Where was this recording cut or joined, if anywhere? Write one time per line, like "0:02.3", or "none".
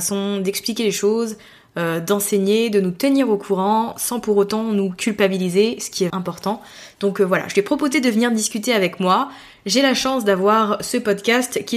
0:06.1